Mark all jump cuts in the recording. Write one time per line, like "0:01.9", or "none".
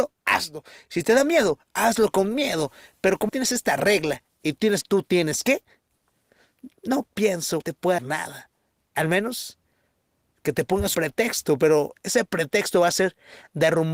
0:03.3
0:04.8
0:07.6
0:08.0
0:10.9